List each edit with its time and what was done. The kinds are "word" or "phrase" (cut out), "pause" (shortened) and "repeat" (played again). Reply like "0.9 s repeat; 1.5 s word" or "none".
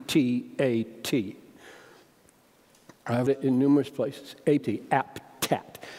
3.3 s phrase; 4.6 s phrase